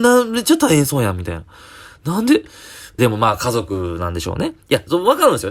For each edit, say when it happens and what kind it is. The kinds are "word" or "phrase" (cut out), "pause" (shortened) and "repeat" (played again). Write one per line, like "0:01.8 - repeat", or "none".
0:03.0 - phrase